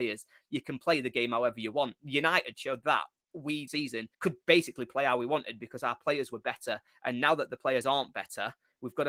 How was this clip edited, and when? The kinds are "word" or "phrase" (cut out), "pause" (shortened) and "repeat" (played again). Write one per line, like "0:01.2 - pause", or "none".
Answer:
0:03.7 - word
0:04.1 - pause